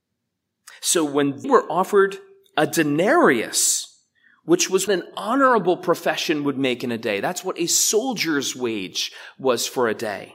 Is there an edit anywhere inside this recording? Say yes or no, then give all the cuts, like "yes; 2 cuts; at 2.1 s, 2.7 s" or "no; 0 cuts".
yes; 2 cuts; at 1.4 s, 4.9 s